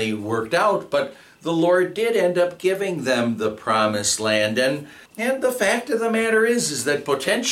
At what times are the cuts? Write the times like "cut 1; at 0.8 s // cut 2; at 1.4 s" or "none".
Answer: cut 1; at 5.1 s